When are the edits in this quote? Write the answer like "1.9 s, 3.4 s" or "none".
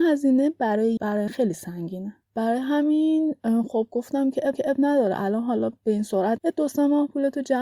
1.0 s, 1.3 s, 2.2 s, 4.5 s, 6.4 s